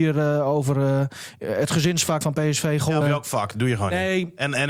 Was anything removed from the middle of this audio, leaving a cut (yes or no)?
yes